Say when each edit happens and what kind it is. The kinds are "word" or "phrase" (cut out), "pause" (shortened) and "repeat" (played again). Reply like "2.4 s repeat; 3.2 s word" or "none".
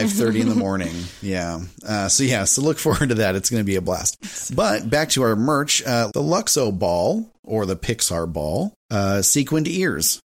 7.3 s pause; 8.8 s pause